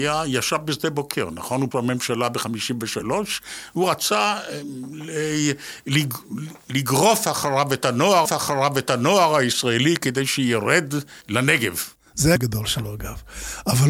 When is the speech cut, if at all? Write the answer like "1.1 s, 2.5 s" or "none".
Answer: 1.7 s, 8.3 s, 11.2 s, 12.4 s